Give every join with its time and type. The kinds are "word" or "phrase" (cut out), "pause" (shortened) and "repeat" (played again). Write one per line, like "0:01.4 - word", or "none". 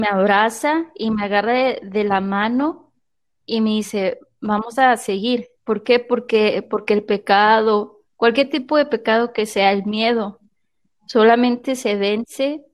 0:05.6 - pause
0:08.0 - pause